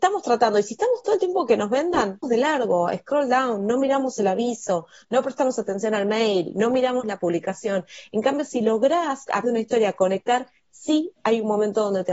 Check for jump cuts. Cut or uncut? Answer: cut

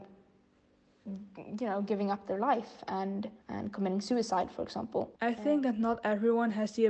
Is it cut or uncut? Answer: cut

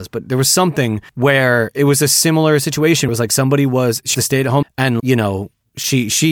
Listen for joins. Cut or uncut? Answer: cut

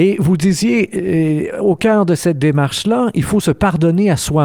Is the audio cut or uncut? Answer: uncut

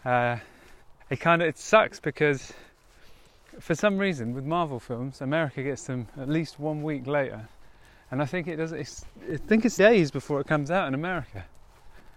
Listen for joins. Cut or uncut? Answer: cut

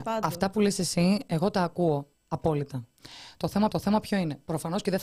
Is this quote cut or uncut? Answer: cut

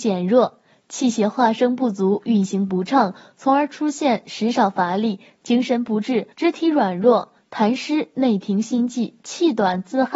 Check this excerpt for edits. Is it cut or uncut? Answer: cut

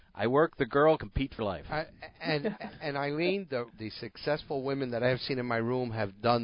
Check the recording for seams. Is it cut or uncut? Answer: cut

